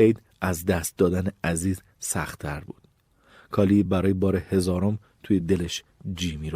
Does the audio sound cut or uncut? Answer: uncut